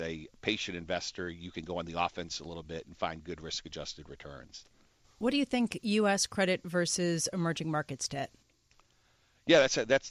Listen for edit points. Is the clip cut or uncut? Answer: uncut